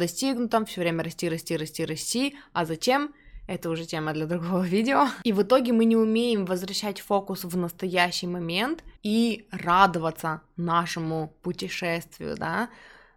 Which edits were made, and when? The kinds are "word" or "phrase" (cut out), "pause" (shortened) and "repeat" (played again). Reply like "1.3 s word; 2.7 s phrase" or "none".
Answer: 9.0 s pause